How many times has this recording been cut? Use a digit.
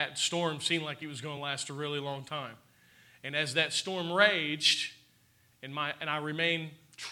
0